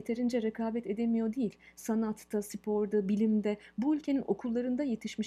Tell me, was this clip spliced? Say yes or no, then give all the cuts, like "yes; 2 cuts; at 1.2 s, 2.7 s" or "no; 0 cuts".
no; 0 cuts